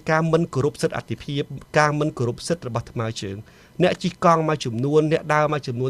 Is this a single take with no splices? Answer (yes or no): yes